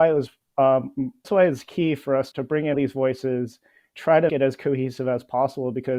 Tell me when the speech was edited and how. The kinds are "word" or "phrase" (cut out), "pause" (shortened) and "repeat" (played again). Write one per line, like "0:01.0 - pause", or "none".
0:01.2 - word
0:02.3 - word
0:02.7 - word
0:03.9 - word
0:04.3 - word